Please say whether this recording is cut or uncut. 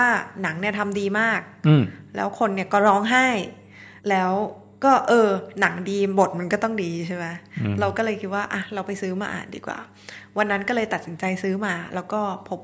cut